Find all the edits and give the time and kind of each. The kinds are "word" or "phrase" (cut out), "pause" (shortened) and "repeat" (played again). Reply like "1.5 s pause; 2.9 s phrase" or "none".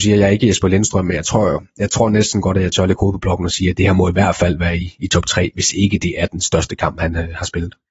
none

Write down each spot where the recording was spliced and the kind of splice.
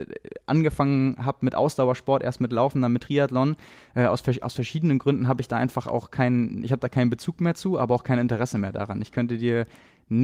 none

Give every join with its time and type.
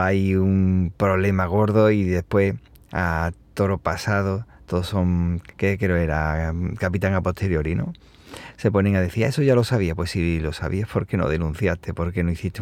3.4 s pause; 5.5 s pause

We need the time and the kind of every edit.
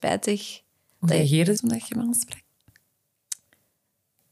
1.6 s phrase

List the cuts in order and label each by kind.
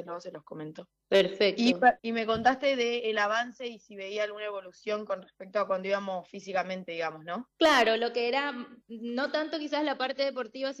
1.0 s pause; 2.0 s pause; 7.5 s pause

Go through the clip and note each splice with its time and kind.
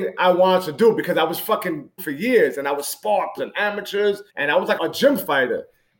2.0 s word; 3.4 s word; 4.3 s pause; 4.8 s word

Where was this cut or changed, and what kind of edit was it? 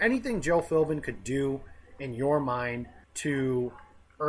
3.0 s pause

